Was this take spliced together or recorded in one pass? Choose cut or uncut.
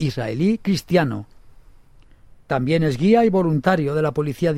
uncut